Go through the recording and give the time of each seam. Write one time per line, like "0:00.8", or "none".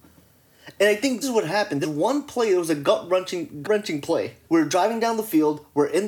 0:01.2
0:01.8
0:03.6
0:04.4